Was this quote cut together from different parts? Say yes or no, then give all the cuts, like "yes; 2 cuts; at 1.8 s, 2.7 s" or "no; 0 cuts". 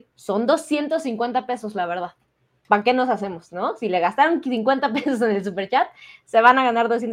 no; 0 cuts